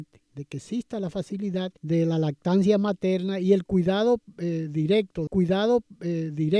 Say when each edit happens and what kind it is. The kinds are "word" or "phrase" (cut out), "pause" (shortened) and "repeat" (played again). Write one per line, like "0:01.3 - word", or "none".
0:01.8 - pause
0:05.3 - repeat